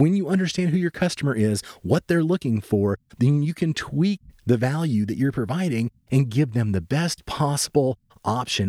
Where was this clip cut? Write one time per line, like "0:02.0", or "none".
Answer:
none

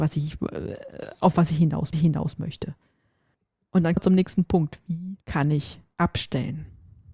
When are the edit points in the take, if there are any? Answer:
0:01.9
0:04.0
0:05.2
0:05.9

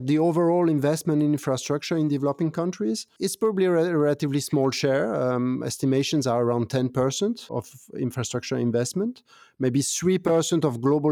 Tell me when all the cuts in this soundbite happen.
none

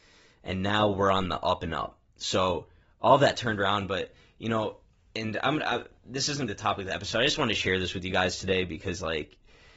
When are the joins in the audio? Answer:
0:06.5

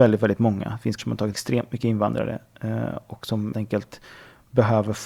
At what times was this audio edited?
0:01.0
0:01.3
0:03.5

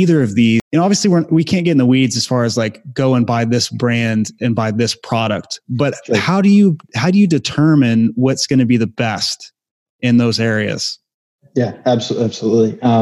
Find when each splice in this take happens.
none

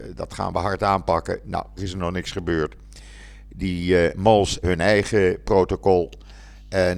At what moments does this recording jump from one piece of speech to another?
0:01.8
0:04.6

